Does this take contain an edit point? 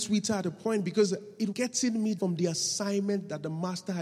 yes; 2 cuts; at 1.5 s, 2.2 s

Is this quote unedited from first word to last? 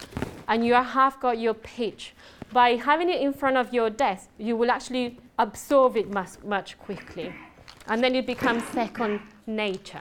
no; 1 cut; at 5.3 s

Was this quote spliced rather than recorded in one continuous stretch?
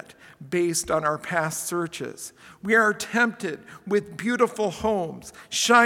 no; 0 cuts

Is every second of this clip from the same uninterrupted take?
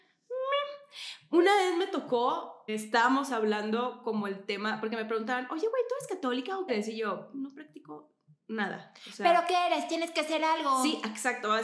no; 2 cuts; at 2.7 s, 6.7 s

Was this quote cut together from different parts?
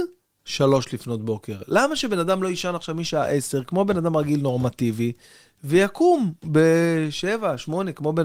no; 0 cuts

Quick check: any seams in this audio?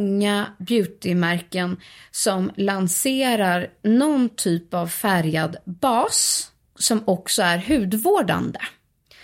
no; 0 cuts

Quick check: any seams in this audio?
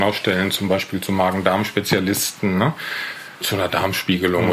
yes; 1 cut; at 3.4 s

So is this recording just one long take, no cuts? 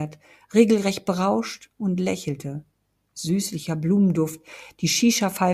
yes; 0 cuts

